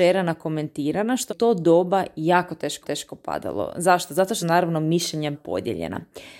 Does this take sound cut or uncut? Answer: cut